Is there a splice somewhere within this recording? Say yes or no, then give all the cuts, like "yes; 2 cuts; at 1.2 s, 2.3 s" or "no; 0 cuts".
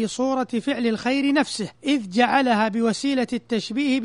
yes; 1 cut; at 1.7 s